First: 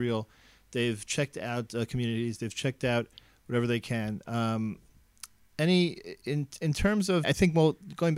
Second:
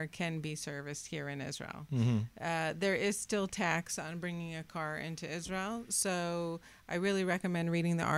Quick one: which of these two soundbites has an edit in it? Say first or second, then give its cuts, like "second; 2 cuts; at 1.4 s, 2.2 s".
first; 1 cut; at 7.2 s